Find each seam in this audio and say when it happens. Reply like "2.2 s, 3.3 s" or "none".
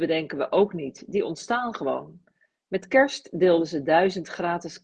none